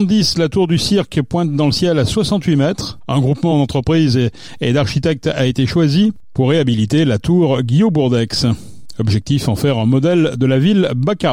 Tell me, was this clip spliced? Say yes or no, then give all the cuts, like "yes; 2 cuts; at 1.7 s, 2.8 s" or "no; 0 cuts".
no; 0 cuts